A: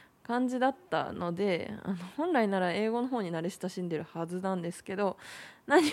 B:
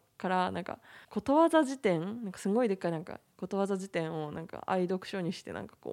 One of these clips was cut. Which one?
B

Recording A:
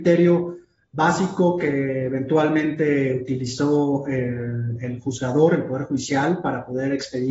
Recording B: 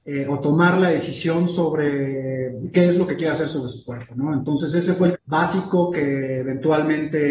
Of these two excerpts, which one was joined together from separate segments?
B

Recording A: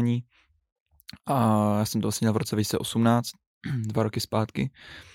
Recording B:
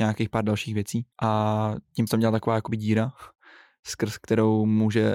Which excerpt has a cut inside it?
B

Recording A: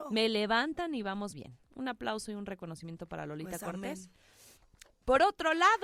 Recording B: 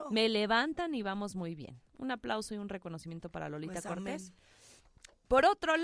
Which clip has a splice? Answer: A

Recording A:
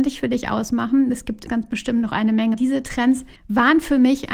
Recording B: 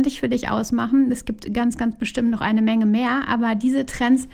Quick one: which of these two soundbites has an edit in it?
A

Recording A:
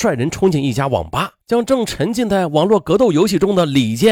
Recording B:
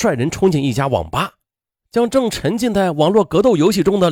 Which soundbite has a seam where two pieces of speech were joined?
A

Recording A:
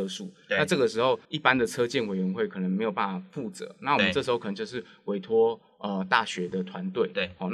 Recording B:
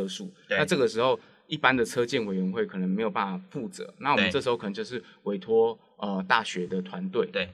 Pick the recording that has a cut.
A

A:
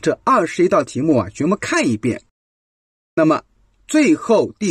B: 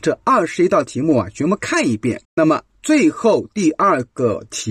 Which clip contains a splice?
B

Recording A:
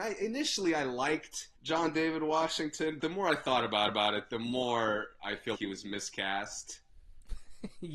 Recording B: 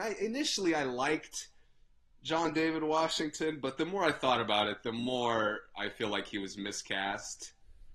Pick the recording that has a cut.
A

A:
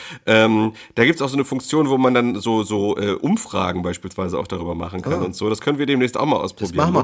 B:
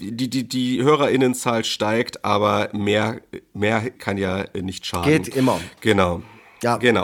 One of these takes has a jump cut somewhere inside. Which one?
B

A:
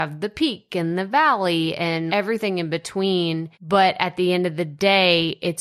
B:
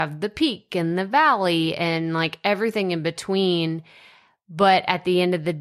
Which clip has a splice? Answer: A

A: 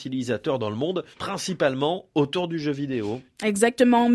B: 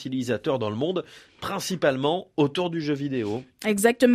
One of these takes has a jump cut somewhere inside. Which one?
A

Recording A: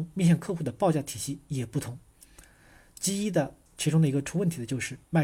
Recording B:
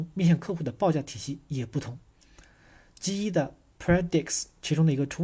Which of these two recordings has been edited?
A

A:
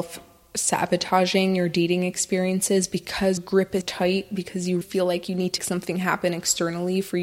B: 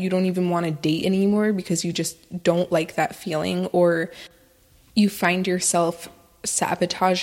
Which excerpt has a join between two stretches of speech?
A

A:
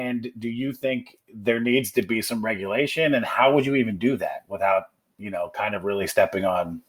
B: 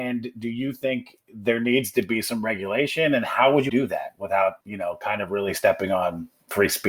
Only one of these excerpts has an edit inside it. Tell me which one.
B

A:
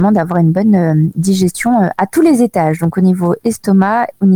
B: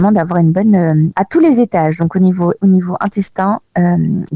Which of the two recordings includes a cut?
B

